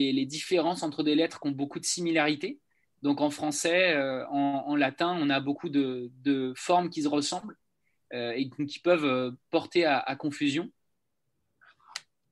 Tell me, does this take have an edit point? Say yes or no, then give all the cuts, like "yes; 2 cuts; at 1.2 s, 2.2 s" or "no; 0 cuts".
no; 0 cuts